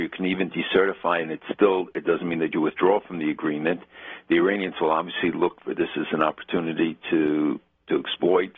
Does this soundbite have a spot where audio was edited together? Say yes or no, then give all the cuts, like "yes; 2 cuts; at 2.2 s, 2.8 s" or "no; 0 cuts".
no; 0 cuts